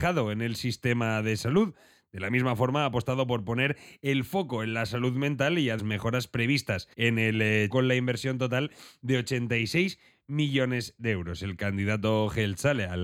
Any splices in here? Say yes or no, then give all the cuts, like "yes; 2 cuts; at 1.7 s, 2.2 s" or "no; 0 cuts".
yes; 3 cuts; at 5.8 s, 6.9 s, 7.7 s